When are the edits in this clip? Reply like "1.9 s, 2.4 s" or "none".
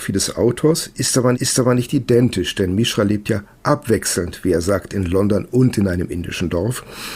1.3 s